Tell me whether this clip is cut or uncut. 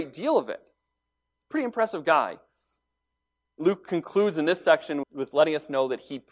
cut